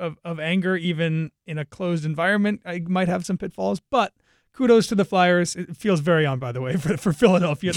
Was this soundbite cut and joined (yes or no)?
yes